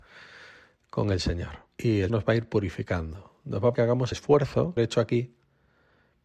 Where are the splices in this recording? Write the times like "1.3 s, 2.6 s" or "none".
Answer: 1.7 s, 2.1 s, 3.7 s, 4.1 s, 4.8 s